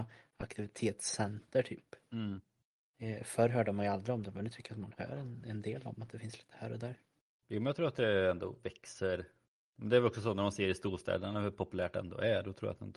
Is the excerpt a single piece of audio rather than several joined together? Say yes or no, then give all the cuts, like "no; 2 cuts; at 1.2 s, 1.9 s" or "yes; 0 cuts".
yes; 0 cuts